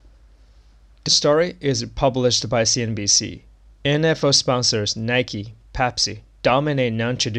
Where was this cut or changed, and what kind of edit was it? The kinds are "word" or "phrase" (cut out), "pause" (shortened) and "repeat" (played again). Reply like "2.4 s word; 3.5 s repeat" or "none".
1.1 s word